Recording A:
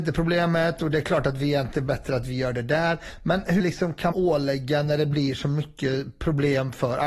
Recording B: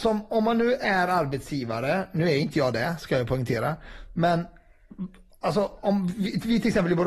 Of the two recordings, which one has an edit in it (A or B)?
A